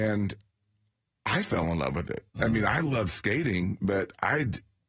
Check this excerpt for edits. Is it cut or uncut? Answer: cut